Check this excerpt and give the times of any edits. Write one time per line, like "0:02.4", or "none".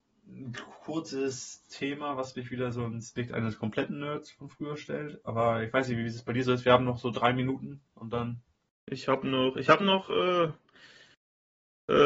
0:08.7